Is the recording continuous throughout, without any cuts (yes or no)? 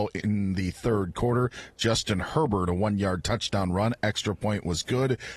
yes